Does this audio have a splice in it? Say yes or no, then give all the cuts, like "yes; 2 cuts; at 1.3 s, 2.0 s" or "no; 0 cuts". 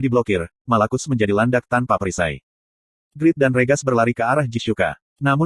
no; 0 cuts